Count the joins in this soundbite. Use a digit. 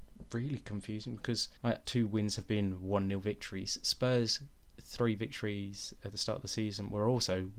1